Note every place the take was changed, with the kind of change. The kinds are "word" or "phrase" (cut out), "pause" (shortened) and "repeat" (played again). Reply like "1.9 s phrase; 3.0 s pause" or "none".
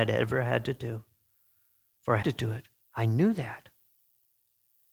2.2 s word; 2.8 s pause